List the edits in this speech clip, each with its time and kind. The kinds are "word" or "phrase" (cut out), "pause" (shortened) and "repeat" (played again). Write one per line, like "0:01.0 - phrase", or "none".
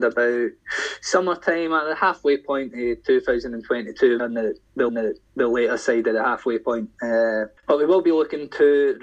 0:04.2 - word
0:04.9 - repeat
0:07.6 - pause